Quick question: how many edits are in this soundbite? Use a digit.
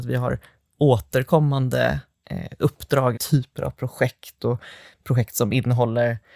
1